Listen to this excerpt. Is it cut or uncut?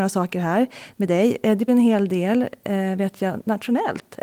cut